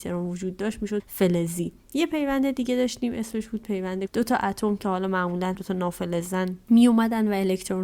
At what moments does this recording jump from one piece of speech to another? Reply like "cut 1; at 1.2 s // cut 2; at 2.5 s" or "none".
cut 1; at 1.0 s // cut 2; at 4.1 s // cut 3; at 5.5 s